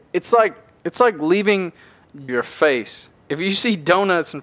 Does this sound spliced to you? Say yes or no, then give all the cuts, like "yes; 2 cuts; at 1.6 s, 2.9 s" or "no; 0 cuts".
yes; 2 cuts; at 2.3 s, 3.2 s